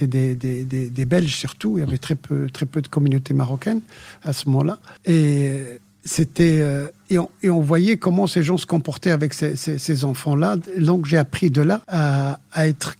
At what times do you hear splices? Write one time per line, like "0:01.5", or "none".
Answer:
0:05.0
0:11.8